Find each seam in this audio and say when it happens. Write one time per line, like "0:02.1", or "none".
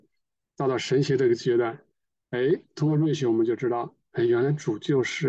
none